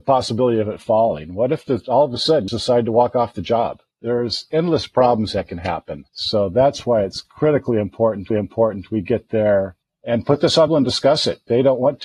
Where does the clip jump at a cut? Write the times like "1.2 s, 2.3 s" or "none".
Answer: 2.5 s, 3.9 s, 6.1 s, 8.3 s, 9.8 s, 10.7 s